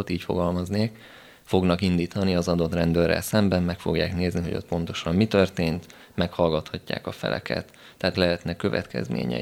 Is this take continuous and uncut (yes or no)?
no